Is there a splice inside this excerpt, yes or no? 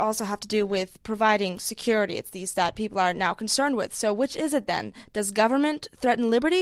yes